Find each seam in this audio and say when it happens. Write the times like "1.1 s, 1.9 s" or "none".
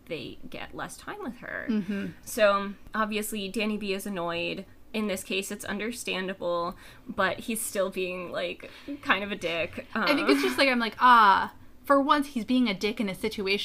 none